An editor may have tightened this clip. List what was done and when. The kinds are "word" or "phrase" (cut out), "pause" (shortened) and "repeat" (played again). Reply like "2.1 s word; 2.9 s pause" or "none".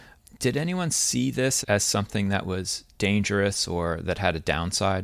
1.6 s word